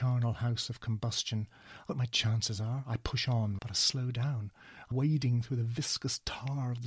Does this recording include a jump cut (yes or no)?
yes